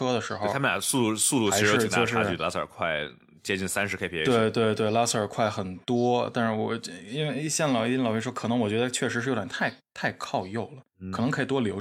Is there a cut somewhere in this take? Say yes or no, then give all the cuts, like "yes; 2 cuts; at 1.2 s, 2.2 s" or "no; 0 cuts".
no; 0 cuts